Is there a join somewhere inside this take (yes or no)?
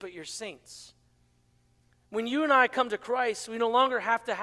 no